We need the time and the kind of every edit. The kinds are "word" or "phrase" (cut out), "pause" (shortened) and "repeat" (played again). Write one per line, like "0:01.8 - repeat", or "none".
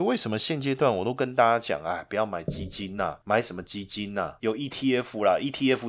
none